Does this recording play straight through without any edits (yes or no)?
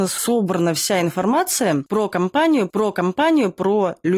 no